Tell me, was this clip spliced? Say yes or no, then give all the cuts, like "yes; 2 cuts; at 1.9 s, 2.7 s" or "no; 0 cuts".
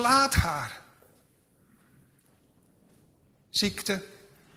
no; 0 cuts